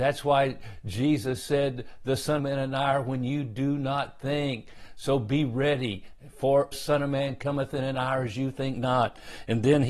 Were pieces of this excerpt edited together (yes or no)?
yes